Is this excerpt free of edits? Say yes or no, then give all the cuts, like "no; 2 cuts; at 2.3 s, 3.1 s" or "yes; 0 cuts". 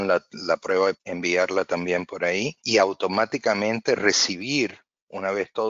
no; 2 cuts; at 1.0 s, 2.6 s